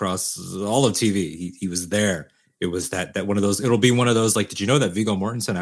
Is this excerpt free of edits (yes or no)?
yes